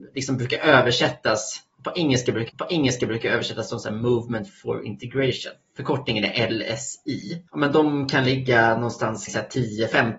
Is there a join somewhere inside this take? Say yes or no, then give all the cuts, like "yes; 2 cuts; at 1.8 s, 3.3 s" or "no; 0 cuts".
yes; 3 cuts; at 2.5 s, 7.5 s, 9.3 s